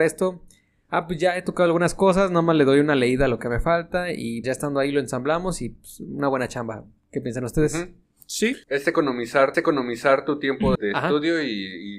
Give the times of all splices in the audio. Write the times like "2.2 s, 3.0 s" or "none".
4.4 s, 8.6 s, 9.5 s, 10.8 s

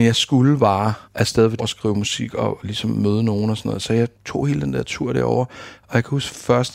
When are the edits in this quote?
1.0 s, 1.6 s, 4.1 s

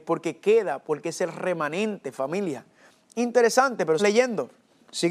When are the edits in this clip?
4.0 s

